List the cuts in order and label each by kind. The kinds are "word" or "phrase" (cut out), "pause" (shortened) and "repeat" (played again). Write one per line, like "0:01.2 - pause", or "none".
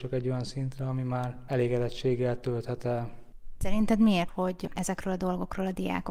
0:04.3 - word
0:04.7 - word